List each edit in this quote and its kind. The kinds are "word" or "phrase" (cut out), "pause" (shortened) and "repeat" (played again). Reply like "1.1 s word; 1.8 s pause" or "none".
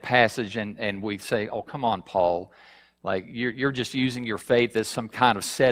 none